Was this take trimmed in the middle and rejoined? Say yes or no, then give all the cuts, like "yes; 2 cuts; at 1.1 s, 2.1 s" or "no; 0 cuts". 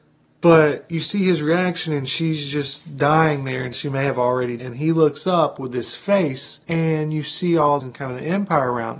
yes; 4 cuts; at 3.7 s, 4.6 s, 6.6 s, 7.8 s